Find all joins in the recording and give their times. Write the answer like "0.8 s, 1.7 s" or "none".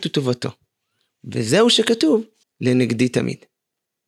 2.4 s